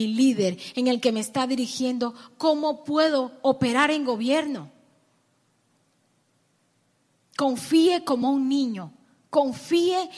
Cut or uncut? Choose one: uncut